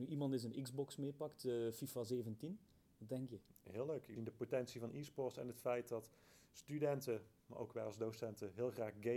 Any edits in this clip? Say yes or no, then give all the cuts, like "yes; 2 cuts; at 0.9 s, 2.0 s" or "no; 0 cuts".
yes; 1 cut; at 4.2 s